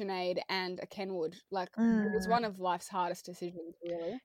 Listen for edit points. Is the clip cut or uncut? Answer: uncut